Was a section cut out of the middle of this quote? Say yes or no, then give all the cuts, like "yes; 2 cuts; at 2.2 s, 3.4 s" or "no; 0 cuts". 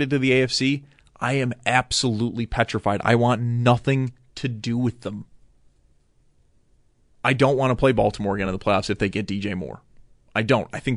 no; 0 cuts